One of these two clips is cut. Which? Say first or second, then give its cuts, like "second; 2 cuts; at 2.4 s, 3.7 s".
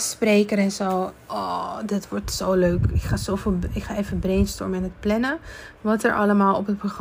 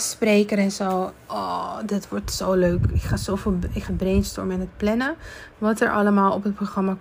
second; 1 cut; at 3.9 s